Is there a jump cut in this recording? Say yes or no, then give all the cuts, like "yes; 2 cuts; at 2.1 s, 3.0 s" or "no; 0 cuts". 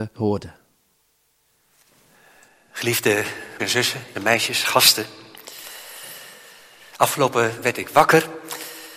yes; 3 cuts; at 3.6 s, 4.1 s, 7.6 s